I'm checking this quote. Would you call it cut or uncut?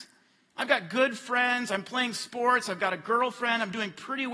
uncut